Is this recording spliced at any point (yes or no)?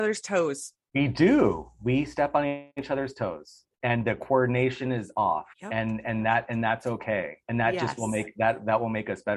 yes